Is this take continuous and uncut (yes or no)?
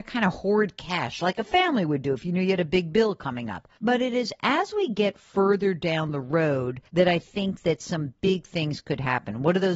no